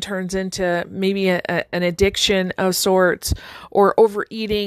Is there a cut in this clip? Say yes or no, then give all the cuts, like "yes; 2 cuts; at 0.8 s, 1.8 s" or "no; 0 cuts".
no; 0 cuts